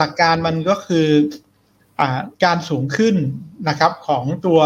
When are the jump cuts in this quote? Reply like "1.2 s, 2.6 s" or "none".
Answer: 2.3 s